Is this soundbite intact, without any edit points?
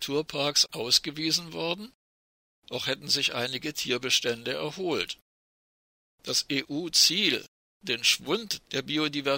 yes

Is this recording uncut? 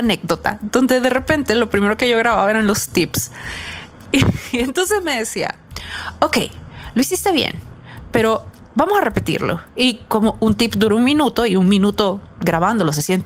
yes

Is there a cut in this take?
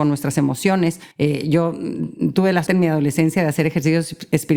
yes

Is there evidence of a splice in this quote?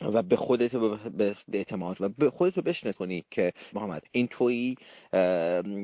yes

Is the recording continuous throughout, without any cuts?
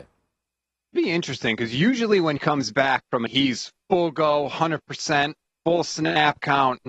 no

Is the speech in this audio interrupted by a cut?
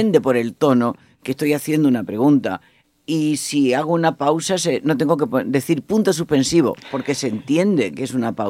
no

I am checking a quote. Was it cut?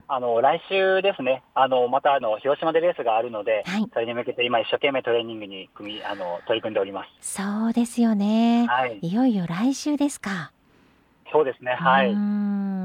yes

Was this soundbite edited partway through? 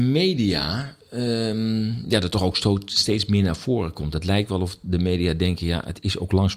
no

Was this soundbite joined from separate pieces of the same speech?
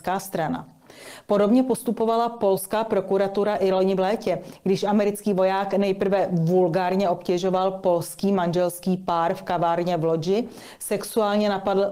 no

